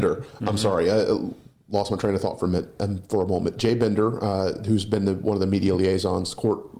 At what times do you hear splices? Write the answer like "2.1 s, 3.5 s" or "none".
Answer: none